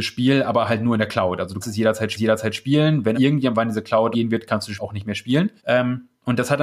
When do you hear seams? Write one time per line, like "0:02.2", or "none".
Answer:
0:01.6
0:02.2
0:03.1
0:04.1
0:04.8
0:05.6

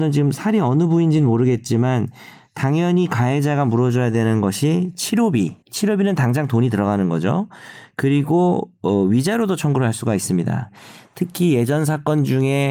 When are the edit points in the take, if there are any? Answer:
0:05.6

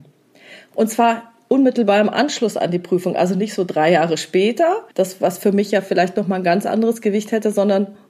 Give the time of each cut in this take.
0:04.9

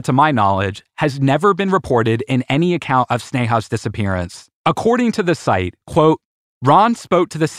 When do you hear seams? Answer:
0:04.6

